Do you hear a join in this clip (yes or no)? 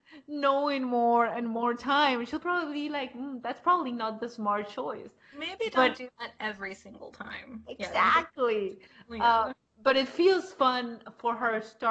yes